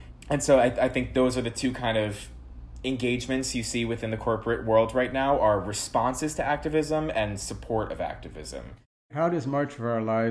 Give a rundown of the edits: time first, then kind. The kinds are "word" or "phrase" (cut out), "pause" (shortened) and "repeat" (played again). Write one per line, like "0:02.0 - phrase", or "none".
none